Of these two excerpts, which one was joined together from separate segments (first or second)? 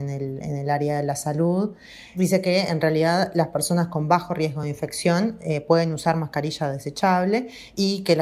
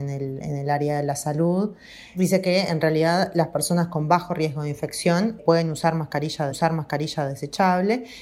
second